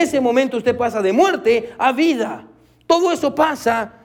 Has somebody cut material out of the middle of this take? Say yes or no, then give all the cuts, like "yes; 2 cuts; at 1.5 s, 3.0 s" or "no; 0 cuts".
no; 0 cuts